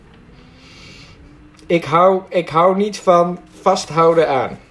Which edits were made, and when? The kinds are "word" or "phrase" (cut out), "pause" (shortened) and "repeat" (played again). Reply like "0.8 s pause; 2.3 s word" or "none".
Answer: none